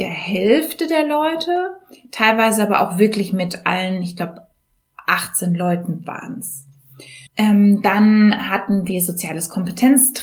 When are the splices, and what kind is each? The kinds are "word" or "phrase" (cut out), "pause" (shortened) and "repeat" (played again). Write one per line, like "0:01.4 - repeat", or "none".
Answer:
0:07.3 - pause